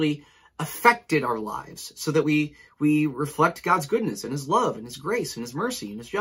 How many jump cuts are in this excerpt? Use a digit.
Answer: 0